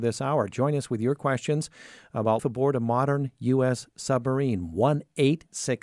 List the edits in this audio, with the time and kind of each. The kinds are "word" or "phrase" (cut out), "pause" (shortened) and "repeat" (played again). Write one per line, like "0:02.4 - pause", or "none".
0:02.4 - word